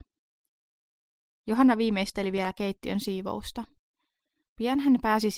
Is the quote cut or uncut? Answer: uncut